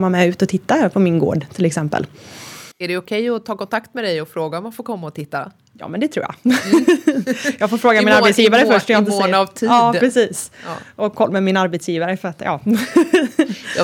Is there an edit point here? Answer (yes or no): yes